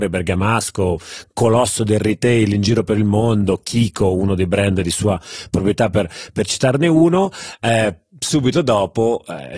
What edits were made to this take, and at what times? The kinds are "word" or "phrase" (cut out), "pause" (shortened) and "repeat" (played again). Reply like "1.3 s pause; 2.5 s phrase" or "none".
none